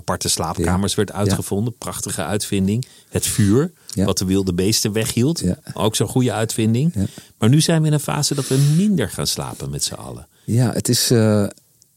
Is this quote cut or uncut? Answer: uncut